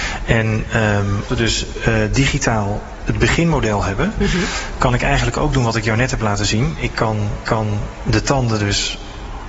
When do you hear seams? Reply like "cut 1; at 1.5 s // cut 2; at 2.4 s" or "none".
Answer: cut 1; at 1.3 s // cut 2; at 7.5 s